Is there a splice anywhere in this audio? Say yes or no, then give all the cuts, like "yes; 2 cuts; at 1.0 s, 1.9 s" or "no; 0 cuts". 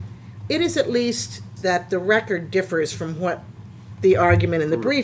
yes; 1 cut; at 1.6 s